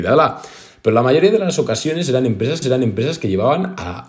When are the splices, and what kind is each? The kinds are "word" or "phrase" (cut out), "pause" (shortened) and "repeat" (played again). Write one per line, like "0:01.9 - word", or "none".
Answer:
0:02.6 - repeat